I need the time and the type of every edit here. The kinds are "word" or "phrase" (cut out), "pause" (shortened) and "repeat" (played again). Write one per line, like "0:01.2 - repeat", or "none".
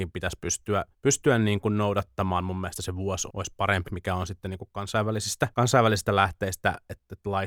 0:00.9 - pause
0:03.3 - word
0:03.8 - word
0:05.5 - pause